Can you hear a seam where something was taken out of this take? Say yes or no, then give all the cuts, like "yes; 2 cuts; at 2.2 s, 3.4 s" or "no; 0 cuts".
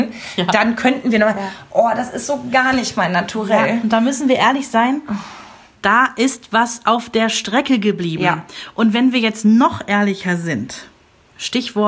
no; 0 cuts